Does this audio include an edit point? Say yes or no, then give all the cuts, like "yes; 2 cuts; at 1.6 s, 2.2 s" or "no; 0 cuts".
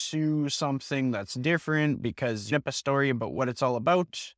yes; 1 cut; at 2.5 s